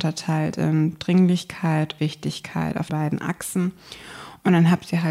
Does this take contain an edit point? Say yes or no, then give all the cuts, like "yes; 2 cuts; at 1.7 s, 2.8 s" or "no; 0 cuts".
yes; 2 cuts; at 2.0 s, 2.9 s